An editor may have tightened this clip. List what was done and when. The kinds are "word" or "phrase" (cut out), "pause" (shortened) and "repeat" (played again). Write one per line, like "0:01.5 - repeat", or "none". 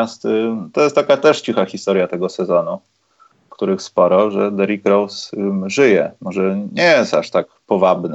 none